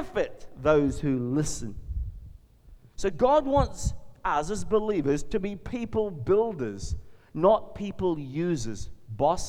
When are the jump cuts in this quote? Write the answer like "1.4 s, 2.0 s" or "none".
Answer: none